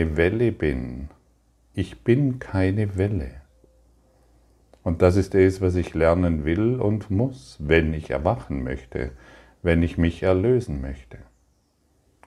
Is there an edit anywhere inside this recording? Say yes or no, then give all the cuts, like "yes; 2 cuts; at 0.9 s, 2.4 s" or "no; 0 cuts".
no; 0 cuts